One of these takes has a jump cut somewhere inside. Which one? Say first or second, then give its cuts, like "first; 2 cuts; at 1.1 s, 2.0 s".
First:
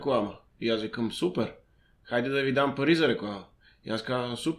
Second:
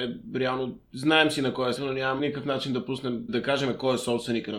second; 3 cuts; at 1.8 s, 2.2 s, 3.3 s